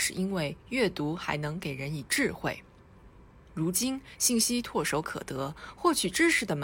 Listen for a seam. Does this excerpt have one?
yes; 1 cut; at 3.3 s

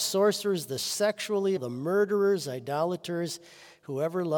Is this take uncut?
no; 1 cut; at 1.6 s

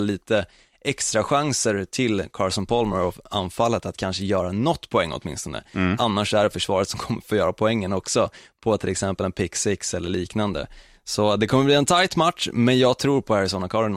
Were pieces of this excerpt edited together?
no; 0 cuts

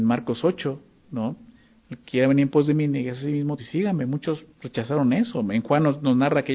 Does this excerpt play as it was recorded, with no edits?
no; 2 cuts; at 3.6 s, 4.5 s

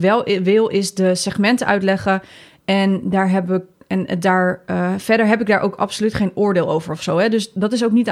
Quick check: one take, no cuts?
yes; 0 cuts

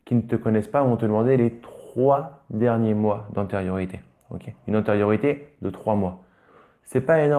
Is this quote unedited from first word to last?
yes; 0 cuts

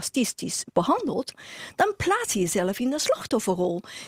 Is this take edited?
no; 0 cuts

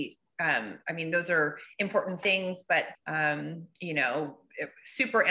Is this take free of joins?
no; 2 cuts; at 2.2 s, 2.9 s

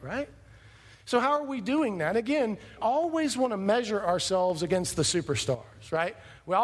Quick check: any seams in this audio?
yes; 1 cut; at 2.8 s

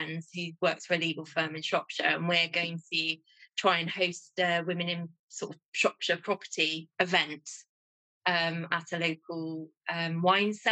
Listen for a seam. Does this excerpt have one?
no; 0 cuts

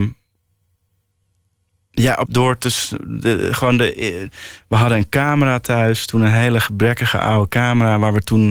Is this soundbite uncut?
no; 1 cut; at 2.3 s

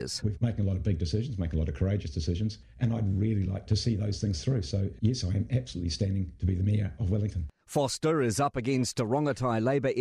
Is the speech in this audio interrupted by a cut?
no; 0 cuts

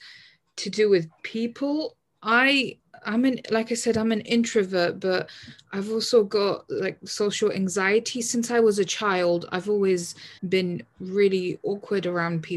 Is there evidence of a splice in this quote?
yes; 2 cuts; at 1.2 s, 10.4 s

